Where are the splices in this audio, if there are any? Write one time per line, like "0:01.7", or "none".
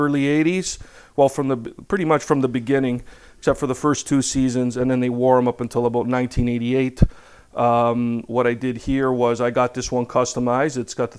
none